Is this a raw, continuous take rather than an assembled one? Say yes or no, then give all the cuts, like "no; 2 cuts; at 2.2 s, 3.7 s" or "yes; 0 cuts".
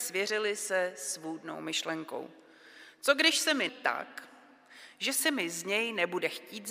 no; 1 cut; at 3.7 s